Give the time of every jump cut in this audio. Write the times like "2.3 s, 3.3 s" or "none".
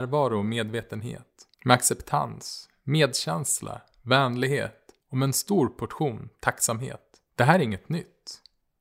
1.5 s, 7.3 s